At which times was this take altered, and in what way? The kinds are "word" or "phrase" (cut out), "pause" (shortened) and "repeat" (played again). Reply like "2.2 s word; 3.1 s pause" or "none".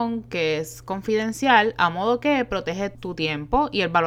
2.9 s word